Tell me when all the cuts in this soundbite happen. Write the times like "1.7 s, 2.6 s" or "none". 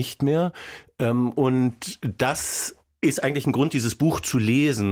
2.8 s